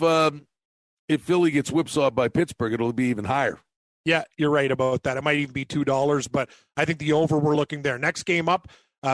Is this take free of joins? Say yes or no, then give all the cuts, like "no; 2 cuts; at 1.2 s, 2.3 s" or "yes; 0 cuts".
yes; 0 cuts